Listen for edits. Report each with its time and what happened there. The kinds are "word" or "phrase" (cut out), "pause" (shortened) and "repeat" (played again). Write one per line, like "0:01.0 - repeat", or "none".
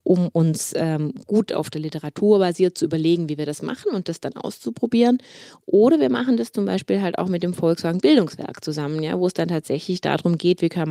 none